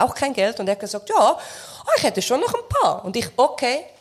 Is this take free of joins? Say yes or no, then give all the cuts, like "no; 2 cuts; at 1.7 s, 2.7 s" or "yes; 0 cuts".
yes; 0 cuts